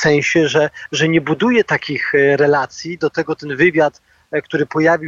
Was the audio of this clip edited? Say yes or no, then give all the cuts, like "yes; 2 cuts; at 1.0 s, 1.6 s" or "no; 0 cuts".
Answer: no; 0 cuts